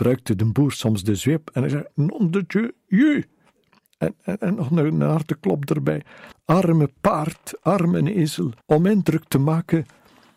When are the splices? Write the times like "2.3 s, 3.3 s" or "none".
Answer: 6.3 s, 8.6 s